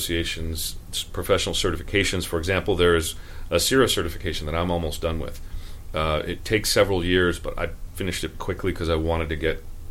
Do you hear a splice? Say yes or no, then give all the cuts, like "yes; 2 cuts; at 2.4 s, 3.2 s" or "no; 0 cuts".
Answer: yes; 1 cut; at 8.3 s